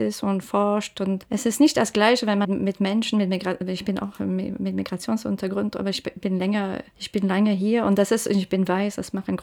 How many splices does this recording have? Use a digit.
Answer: 1